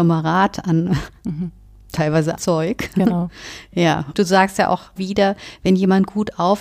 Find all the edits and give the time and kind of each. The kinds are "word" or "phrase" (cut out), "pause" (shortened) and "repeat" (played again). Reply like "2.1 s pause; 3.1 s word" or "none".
2.4 s word; 4.1 s word; 5.0 s word